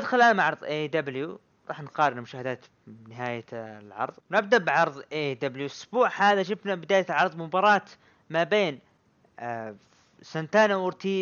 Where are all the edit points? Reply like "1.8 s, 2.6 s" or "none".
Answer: 4.2 s